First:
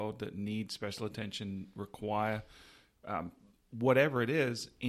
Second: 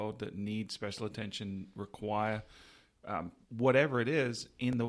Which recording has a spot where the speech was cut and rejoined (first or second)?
second